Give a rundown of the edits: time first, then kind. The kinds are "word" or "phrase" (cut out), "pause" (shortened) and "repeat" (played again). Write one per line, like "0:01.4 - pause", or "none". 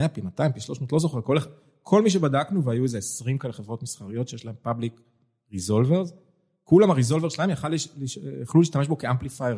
none